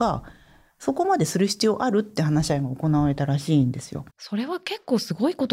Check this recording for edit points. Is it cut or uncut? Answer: cut